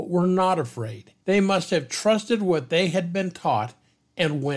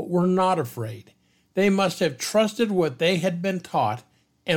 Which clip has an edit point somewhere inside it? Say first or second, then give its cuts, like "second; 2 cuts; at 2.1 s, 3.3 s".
first; 1 cut; at 1.2 s